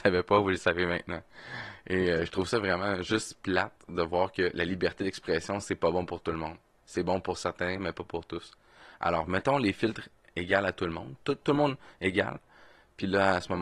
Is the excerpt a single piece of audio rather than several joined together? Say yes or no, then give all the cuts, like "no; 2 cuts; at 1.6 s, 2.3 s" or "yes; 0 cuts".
yes; 0 cuts